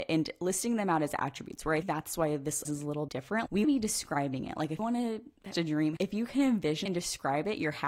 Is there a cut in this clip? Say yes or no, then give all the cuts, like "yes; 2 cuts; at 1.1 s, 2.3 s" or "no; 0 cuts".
yes; 8 cuts; at 1.8 s, 2.7 s, 3.1 s, 3.6 s, 4.8 s, 5.5 s, 6.0 s, 6.9 s